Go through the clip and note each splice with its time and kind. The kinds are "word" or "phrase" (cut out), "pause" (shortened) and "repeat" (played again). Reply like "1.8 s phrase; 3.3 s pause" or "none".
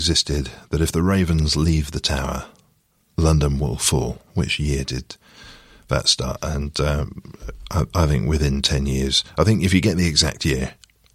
none